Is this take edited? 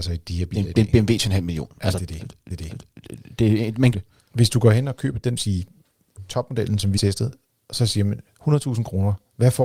yes; 4 cuts; at 2.5 s, 3.9 s, 5.4 s, 7.0 s

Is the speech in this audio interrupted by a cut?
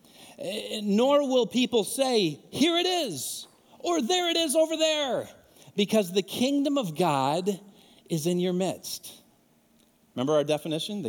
no; 0 cuts

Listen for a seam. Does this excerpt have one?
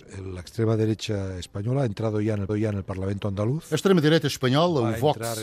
yes; 1 cut; at 2.5 s

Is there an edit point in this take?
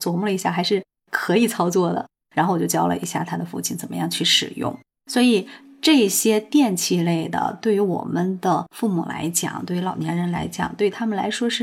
no; 0 cuts

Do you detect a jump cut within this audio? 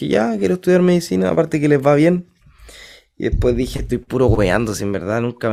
no; 0 cuts

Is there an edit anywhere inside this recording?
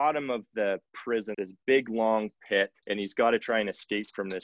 yes; 2 cuts; at 1.3 s, 2.8 s

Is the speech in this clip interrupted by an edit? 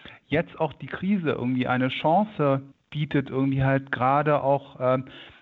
yes; 1 cut; at 2.7 s

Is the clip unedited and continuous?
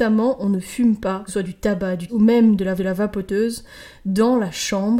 no; 3 cuts; at 1.3 s, 2.1 s, 2.8 s

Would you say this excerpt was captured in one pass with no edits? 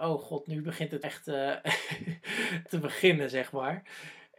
no; 2 cuts; at 1.0 s, 2.7 s

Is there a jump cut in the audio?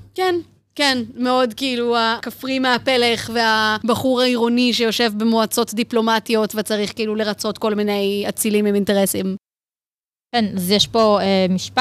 no; 0 cuts

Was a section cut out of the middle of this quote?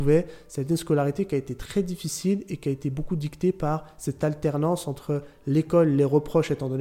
no; 0 cuts

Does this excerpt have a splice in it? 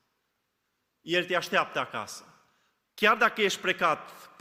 no; 0 cuts

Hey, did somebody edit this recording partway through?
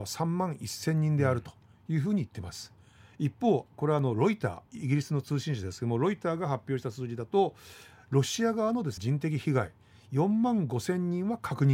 yes; 2 cuts; at 4.7 s, 9.0 s

